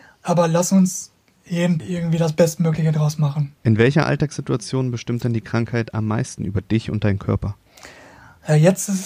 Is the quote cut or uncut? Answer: cut